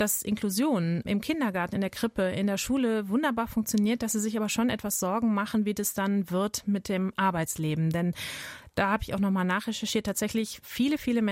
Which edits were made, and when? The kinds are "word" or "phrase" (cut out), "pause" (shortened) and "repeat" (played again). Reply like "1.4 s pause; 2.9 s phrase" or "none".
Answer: none